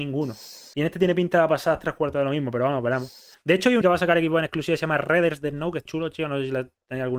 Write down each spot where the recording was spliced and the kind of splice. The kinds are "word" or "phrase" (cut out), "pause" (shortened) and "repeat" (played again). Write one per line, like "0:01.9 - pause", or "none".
0:03.8 - word
0:05.9 - word